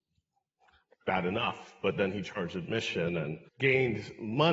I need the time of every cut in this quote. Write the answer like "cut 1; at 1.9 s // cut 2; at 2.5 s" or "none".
cut 1; at 3.5 s